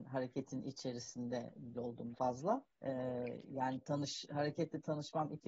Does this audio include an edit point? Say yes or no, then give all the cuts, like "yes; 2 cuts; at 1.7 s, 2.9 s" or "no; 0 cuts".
yes; 3 cuts; at 1.7 s, 2.1 s, 2.7 s